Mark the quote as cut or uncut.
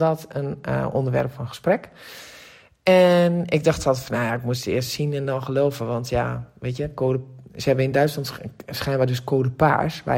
uncut